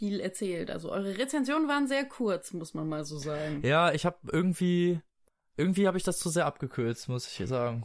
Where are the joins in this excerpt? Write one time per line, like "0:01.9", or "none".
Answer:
none